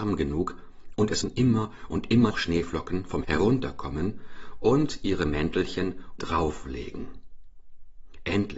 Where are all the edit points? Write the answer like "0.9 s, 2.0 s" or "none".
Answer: 1.2 s, 2.3 s, 3.2 s, 6.2 s